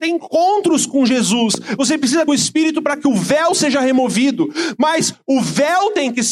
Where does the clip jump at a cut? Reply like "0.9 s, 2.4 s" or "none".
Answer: 2.3 s